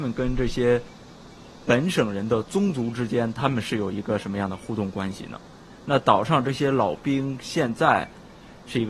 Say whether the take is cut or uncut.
uncut